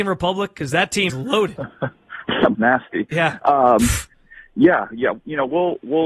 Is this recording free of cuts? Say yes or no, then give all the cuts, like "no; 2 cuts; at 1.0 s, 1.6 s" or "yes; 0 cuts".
no; 2 cuts; at 1.1 s, 2.5 s